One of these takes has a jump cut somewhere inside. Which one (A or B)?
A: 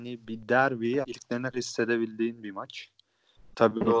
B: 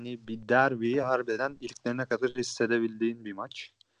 A